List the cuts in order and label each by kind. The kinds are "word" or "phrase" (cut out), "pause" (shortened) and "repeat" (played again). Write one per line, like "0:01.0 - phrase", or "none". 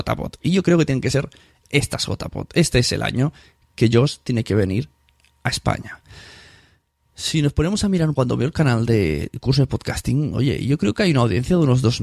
0:08.2 - phrase